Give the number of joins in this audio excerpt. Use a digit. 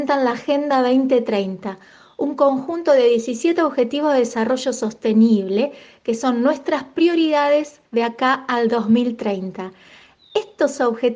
1